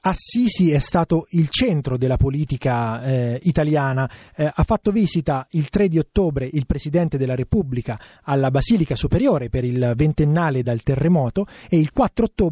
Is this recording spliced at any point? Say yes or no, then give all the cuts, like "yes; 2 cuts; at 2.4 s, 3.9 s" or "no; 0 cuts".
no; 0 cuts